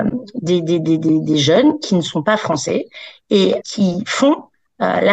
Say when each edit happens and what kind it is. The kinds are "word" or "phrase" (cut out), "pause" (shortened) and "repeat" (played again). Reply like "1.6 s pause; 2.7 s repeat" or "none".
3.6 s word